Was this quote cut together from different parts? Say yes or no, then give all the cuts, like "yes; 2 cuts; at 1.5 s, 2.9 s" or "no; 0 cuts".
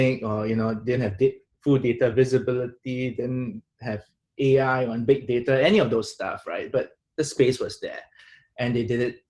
no; 0 cuts